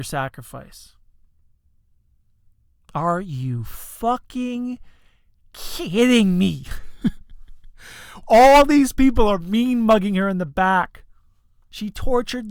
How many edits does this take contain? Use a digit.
1